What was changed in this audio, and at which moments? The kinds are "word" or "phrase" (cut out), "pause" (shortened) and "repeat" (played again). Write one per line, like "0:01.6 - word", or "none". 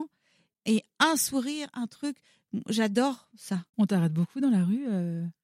0:03.7 - pause